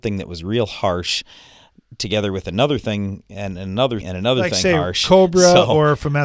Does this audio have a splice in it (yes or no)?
yes